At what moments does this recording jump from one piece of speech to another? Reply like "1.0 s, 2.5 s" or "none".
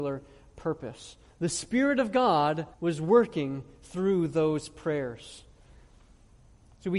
2.7 s